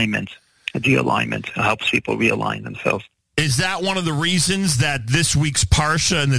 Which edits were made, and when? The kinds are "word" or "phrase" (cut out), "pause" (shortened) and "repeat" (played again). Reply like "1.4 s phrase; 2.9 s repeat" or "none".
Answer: none